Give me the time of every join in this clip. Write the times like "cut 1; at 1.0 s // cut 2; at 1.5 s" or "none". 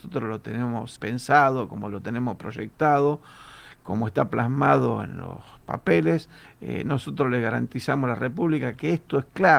cut 1; at 1.0 s

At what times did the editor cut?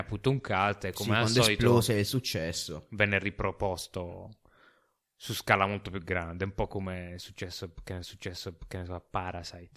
cut 1; at 8.0 s

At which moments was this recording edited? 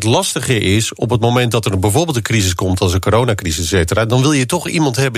none

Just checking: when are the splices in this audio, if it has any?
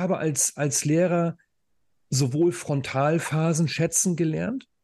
none

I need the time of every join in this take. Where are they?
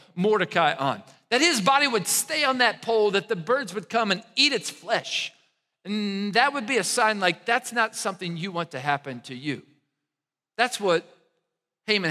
none

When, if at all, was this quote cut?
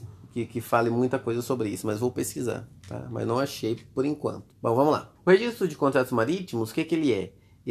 cut 1; at 4.5 s // cut 2; at 5.2 s

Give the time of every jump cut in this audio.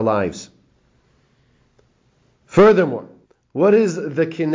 cut 1; at 3.3 s

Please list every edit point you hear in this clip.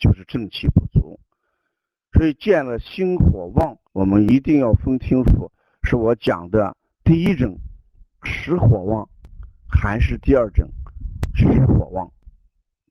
cut 1; at 3.8 s

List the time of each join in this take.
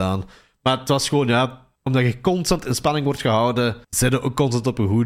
cut 1; at 1.8 s // cut 2; at 3.8 s

